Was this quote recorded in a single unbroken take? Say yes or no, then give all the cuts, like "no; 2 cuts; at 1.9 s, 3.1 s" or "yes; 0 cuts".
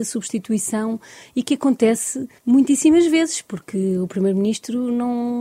no; 1 cut; at 2.4 s